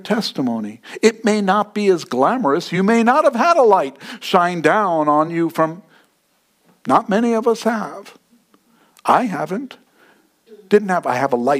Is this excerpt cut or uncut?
uncut